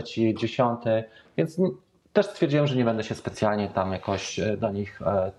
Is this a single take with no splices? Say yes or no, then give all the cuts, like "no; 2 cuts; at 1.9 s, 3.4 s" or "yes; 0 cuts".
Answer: yes; 0 cuts